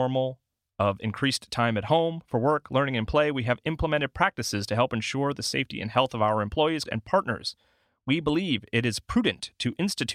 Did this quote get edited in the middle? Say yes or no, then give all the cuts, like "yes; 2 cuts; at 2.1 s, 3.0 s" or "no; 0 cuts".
yes; 1 cut; at 6.9 s